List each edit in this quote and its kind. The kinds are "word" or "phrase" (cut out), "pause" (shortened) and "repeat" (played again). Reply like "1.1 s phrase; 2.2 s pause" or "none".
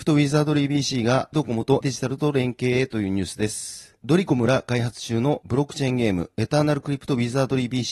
1.3 s word; 1.8 s word